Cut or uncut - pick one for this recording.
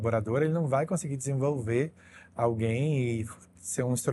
uncut